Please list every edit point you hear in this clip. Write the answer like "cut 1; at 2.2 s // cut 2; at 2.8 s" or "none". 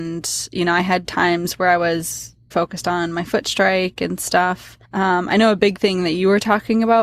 cut 1; at 2.5 s // cut 2; at 4.8 s

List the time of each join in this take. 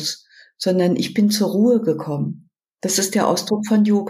none

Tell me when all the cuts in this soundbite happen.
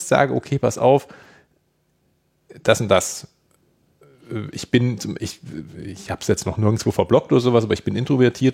none

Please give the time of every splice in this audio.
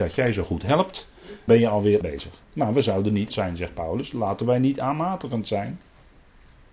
cut 1; at 1.5 s // cut 2; at 2.0 s // cut 3; at 2.4 s // cut 4; at 3.3 s

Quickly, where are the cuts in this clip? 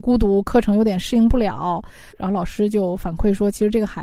cut 1; at 2.1 s

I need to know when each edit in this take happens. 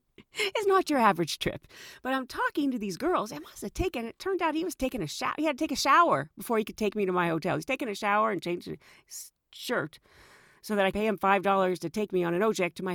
cut 1; at 10.9 s

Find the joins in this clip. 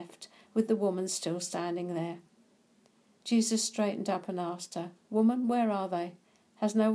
none

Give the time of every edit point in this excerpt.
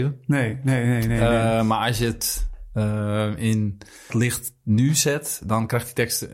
cut 1; at 4.1 s

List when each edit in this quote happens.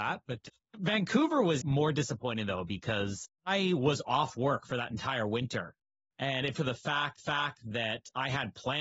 cut 1; at 1.6 s // cut 2; at 6.5 s // cut 3; at 7.2 s

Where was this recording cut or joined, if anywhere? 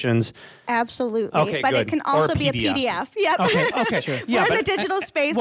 none

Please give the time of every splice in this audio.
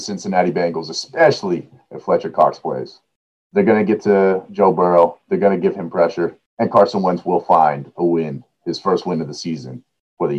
cut 1; at 3.3 s // cut 2; at 6.5 s

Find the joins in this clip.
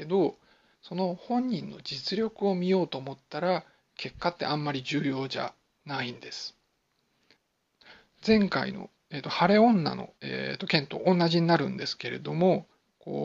cut 1; at 10.2 s

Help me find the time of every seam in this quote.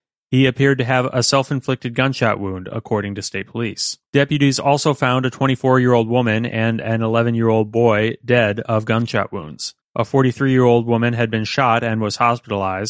cut 1; at 4.0 s // cut 2; at 9.8 s

